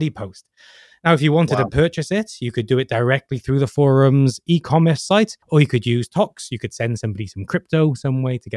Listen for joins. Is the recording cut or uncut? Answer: cut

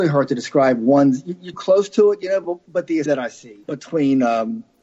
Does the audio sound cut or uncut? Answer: cut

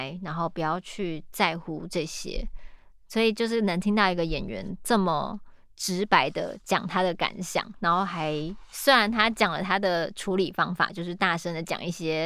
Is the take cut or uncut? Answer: uncut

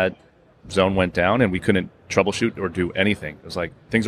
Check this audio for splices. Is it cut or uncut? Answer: uncut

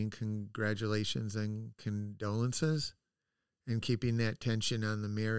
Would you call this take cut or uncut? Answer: uncut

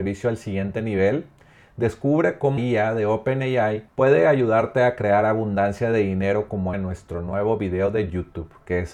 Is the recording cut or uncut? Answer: cut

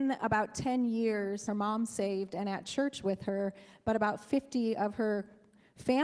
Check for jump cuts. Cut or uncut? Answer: cut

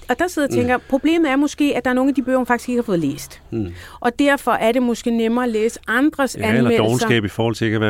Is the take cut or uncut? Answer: uncut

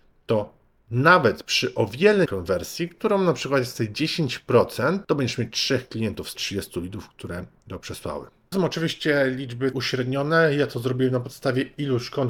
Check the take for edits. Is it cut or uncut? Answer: cut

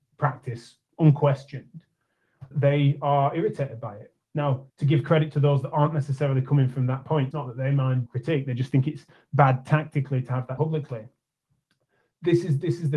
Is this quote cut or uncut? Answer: cut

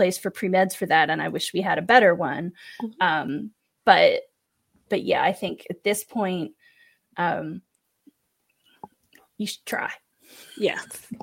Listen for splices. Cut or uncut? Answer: uncut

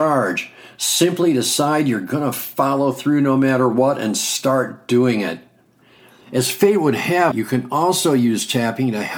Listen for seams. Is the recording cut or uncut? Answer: cut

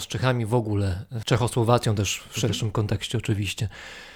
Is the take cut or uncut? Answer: cut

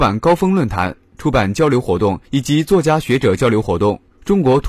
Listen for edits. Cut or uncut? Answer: cut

